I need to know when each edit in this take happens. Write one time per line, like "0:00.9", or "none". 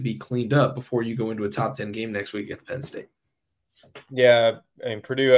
0:04.0